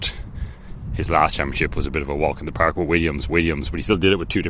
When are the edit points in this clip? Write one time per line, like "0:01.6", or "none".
0:03.3